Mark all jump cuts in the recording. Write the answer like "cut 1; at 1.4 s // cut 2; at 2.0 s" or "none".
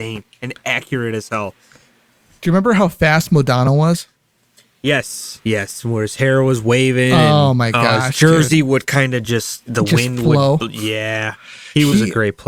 none